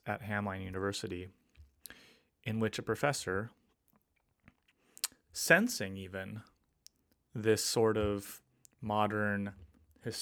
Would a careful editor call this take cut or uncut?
uncut